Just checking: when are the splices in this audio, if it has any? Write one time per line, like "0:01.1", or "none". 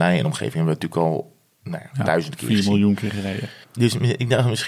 0:03.6